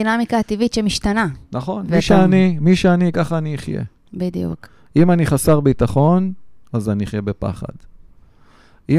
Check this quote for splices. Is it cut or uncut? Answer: uncut